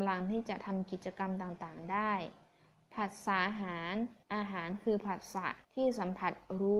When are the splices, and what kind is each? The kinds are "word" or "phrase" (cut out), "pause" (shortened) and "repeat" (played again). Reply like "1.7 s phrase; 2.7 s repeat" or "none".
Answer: 4.2 s pause; 5.6 s pause